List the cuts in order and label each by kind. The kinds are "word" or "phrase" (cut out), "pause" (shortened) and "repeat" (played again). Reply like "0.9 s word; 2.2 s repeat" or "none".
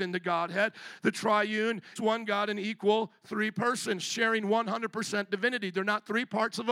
2.0 s word